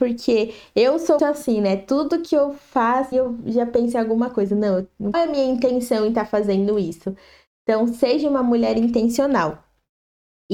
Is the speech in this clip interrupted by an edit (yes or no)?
yes